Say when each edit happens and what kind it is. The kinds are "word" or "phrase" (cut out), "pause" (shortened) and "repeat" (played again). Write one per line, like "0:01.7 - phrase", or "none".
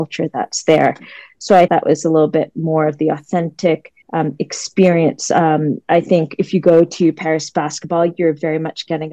0:01.7 - word
0:04.0 - pause